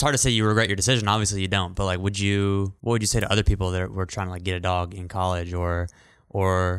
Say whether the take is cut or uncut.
cut